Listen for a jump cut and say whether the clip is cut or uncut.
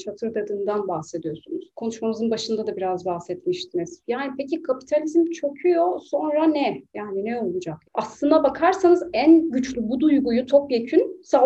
uncut